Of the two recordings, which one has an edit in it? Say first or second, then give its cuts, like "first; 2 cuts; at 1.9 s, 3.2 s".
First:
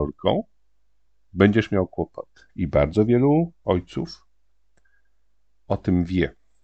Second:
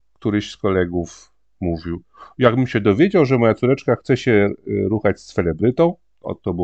first; 2 cuts; at 2.5 s, 3.6 s